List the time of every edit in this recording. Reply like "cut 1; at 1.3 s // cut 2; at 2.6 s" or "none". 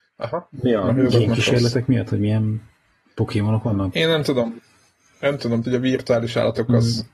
cut 1; at 5.6 s